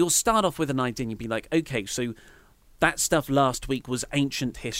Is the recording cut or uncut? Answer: uncut